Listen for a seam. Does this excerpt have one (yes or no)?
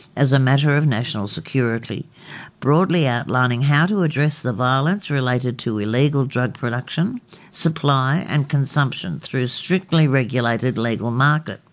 no